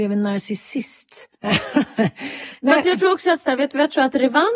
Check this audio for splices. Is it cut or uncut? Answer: cut